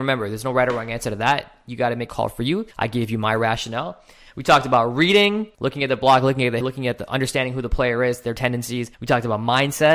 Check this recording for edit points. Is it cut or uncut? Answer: cut